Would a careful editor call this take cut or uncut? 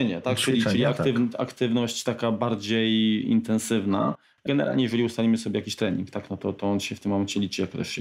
cut